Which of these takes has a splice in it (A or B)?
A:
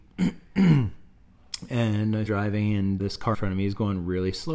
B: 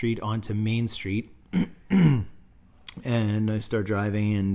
A